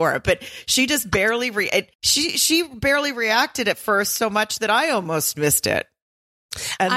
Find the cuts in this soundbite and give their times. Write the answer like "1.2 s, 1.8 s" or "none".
1.9 s